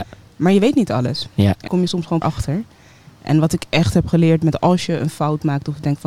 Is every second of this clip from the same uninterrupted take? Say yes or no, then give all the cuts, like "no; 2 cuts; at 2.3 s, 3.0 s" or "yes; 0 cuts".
no; 2 cuts; at 1.7 s, 2.2 s